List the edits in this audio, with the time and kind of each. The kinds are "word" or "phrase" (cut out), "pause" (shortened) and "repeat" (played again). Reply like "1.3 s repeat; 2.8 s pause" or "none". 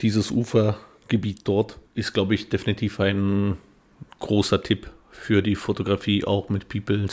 1.9 s pause